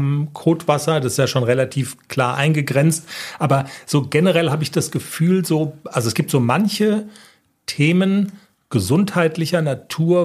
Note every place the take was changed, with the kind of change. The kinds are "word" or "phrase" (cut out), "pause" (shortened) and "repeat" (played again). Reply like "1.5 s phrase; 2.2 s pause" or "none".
none